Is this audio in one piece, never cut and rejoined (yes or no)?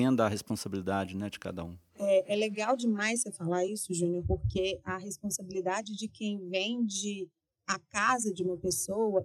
yes